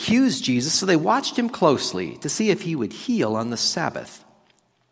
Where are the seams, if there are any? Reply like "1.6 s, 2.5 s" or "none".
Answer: none